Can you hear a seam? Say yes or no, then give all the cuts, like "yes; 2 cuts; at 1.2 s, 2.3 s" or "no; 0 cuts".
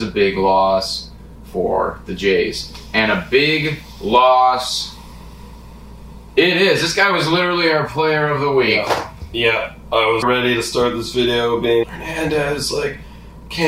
yes; 2 cuts; at 10.2 s, 11.8 s